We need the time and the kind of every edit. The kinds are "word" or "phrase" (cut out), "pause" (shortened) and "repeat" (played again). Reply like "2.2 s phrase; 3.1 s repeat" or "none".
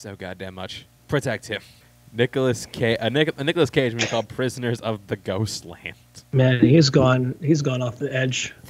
1.0 s pause; 1.8 s pause